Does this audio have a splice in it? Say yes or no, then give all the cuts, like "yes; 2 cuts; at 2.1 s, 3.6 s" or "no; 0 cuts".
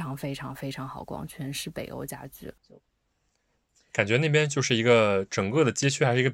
yes; 1 cut; at 2.6 s